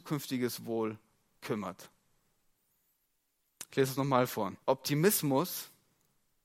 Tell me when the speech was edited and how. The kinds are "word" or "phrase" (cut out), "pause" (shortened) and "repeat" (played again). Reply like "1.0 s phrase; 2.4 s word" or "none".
4.6 s pause